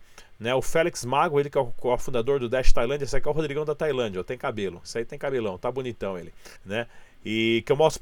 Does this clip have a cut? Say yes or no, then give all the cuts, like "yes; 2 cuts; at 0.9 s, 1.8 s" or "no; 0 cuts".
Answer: yes; 1 cut; at 6.6 s